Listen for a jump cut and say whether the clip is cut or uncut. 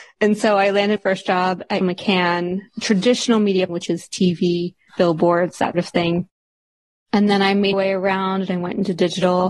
cut